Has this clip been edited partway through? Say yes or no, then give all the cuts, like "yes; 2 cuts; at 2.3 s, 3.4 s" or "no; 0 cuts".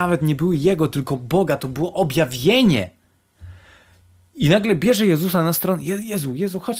no; 0 cuts